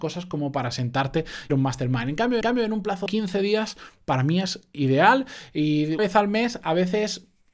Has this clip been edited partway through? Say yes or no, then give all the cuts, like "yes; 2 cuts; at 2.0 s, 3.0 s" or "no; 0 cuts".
yes; 4 cuts; at 1.5 s, 2.4 s, 3.1 s, 6.0 s